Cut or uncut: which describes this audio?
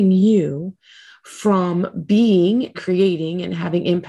cut